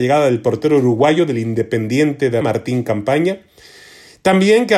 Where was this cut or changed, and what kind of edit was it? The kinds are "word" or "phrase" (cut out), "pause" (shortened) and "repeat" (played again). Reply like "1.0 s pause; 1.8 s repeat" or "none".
2.4 s word